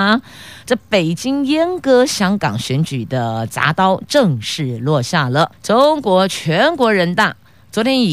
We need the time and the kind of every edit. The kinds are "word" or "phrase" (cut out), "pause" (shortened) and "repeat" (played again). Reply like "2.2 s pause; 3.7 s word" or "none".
5.5 s pause